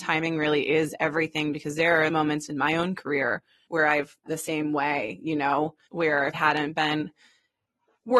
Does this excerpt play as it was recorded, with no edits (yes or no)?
no